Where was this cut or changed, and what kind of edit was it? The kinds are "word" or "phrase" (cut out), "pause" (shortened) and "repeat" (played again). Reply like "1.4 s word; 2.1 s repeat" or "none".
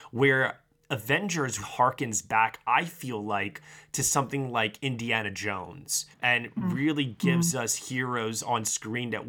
1.6 s word; 6.1 s pause